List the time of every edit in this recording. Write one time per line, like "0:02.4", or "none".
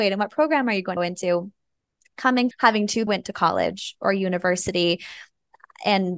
0:01.0
0:02.5
0:03.1